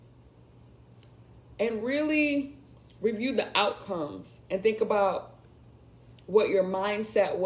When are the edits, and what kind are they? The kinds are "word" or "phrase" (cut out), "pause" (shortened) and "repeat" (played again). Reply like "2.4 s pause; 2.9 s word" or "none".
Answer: none